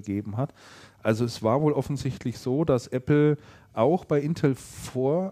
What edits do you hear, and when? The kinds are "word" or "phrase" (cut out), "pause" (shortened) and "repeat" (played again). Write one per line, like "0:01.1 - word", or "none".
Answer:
none